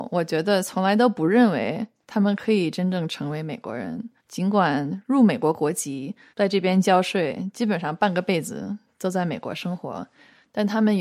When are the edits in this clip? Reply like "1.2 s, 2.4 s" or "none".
4.2 s